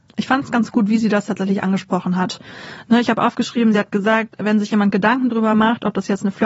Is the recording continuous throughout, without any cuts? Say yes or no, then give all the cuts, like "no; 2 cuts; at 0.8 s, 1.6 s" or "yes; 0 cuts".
yes; 0 cuts